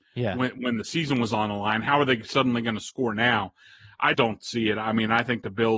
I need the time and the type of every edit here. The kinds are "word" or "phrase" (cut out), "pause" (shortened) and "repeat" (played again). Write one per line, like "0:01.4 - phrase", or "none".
0:04.1 - word